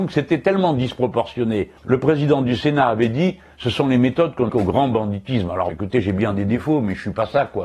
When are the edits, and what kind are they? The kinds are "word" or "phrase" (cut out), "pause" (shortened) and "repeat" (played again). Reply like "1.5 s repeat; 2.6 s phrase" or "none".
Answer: 1.8 s pause; 4.5 s word; 5.7 s word

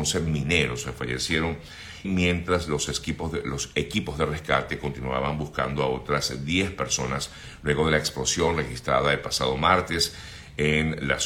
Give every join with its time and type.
2.0 s word

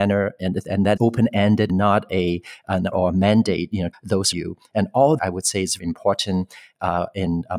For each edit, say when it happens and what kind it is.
1.0 s word; 1.7 s word; 2.9 s word; 3.9 s word; 4.3 s word; 5.2 s word; 5.8 s word

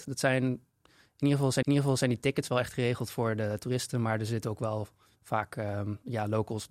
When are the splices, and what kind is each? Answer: 1.6 s repeat

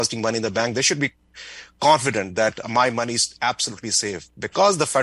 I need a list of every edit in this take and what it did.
none

